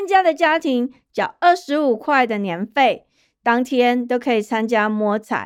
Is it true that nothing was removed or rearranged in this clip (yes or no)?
yes